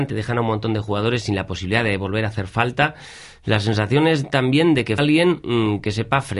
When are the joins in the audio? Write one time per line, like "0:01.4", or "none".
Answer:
0:05.0